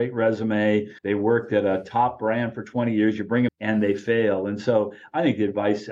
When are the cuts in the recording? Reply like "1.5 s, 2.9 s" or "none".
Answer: 1.0 s, 3.5 s